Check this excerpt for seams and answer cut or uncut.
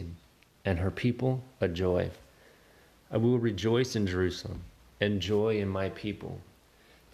uncut